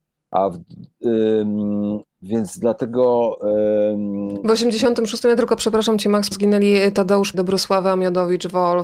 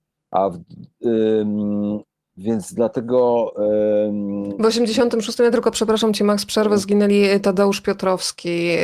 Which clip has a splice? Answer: first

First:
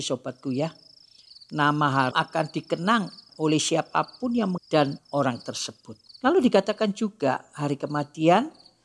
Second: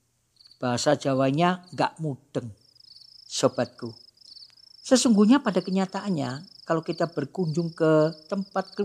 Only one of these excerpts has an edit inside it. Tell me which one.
first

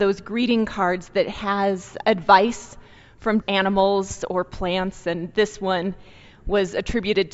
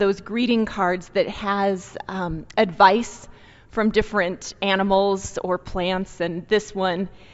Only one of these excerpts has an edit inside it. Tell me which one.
first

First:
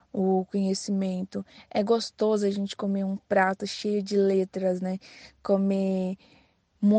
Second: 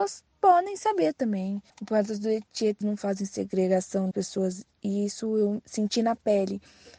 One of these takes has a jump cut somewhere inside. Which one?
second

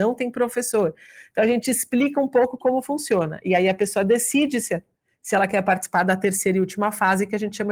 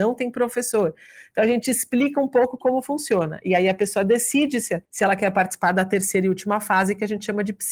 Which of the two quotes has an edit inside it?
second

